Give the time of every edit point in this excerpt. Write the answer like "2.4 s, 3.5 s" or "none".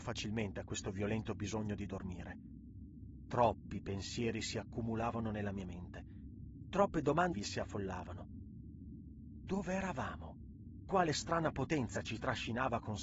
7.3 s